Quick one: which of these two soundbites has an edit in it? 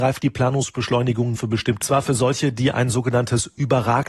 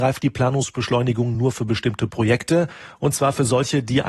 first; 2 cuts; at 1.3 s, 1.8 s

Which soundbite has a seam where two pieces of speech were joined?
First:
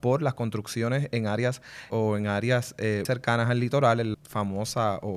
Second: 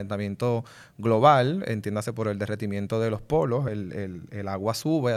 first; 3 cuts; at 1.9 s, 3.1 s, 4.1 s

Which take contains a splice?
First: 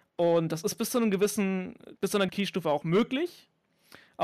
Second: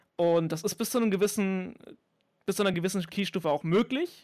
first; 2 cuts; at 2.0 s, 2.3 s

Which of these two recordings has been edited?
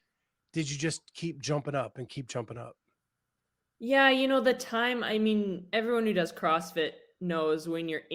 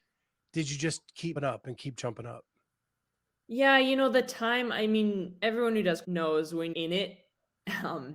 second; 3 cuts; at 1.4 s, 6.0 s, 6.7 s

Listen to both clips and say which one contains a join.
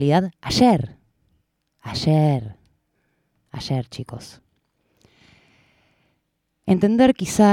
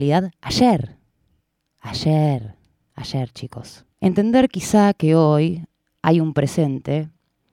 second; 2 cuts; at 2.8 s, 3.9 s

